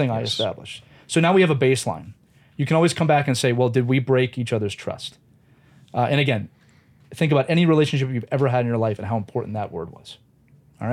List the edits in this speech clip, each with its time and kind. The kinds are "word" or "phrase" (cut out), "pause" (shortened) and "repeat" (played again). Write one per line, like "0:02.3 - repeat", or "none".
none